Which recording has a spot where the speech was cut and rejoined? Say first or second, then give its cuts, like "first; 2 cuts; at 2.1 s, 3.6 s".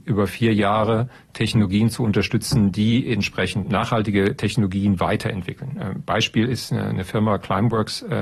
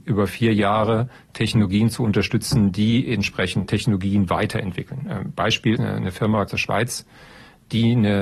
second; 3 cuts; at 3.7 s, 5.8 s, 6.5 s